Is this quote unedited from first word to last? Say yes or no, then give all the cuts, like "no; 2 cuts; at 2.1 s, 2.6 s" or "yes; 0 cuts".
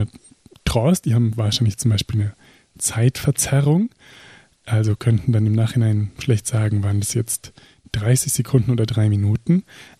yes; 0 cuts